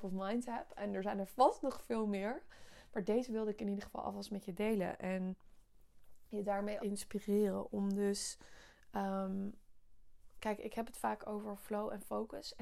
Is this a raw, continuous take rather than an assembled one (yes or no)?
no